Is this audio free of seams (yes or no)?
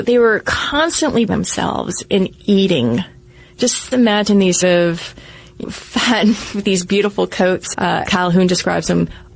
no